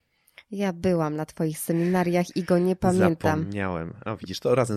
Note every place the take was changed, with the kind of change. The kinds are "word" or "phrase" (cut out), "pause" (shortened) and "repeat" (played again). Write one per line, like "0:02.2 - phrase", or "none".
none